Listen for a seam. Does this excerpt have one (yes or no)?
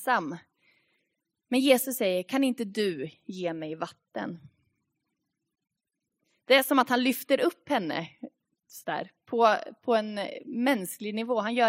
no